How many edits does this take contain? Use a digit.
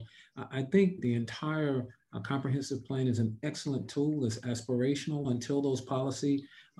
2